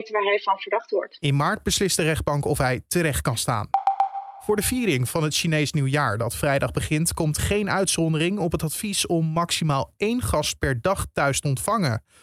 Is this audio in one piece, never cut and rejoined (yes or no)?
yes